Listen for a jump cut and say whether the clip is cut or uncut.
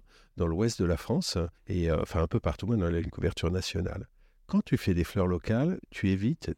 cut